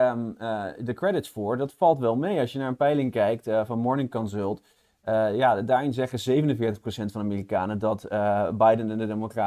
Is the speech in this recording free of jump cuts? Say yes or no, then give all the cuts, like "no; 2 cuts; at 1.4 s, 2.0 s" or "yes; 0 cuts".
yes; 0 cuts